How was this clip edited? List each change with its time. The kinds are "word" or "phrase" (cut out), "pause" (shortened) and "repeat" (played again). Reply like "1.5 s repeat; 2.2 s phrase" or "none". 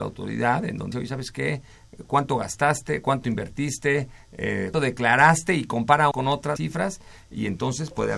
0.9 s word; 4.7 s word; 6.1 s word; 6.6 s word